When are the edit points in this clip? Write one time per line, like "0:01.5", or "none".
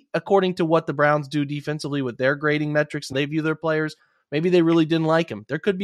0:03.1